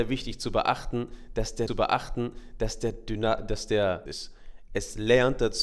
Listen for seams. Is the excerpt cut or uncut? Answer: cut